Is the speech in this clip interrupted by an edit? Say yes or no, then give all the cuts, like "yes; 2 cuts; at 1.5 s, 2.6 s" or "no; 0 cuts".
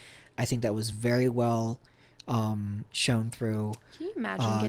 no; 0 cuts